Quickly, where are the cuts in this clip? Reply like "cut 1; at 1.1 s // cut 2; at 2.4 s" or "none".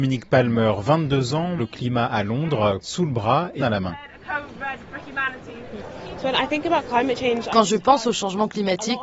cut 1; at 1.6 s // cut 2; at 2.8 s // cut 3; at 3.6 s